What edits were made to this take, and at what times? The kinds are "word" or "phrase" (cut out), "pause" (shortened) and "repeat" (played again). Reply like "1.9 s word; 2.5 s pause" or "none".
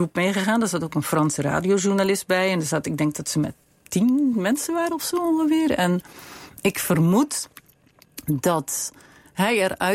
none